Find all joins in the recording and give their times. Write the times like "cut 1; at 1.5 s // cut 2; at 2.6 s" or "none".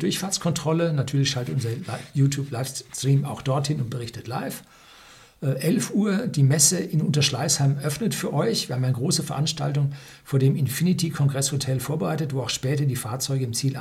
none